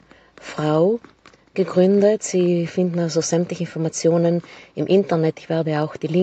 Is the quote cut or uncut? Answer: uncut